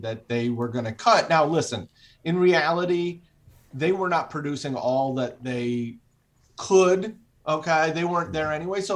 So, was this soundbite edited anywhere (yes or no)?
no